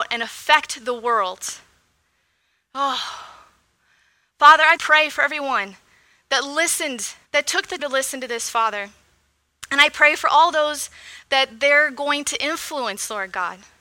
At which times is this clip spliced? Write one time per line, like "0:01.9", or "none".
0:04.8
0:07.2
0:07.8